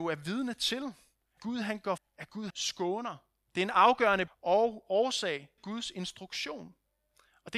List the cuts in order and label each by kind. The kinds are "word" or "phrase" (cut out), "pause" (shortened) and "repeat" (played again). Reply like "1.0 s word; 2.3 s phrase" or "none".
1.4 s word; 2.0 s word; 2.5 s word; 4.3 s word; 5.6 s word